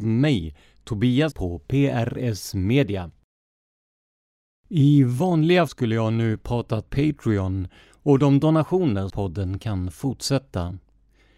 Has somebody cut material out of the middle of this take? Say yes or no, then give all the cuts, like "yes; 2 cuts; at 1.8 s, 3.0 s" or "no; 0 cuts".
yes; 4 cuts; at 1.3 s, 5.7 s, 6.9 s, 9.1 s